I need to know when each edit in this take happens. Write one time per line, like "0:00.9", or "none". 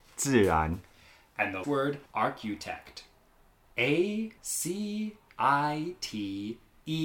0:01.6
0:02.1
0:04.4
0:05.3